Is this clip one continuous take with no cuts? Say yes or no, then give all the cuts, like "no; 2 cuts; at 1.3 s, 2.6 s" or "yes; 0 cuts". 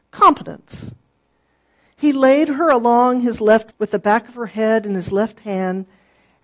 no; 1 cut; at 3.7 s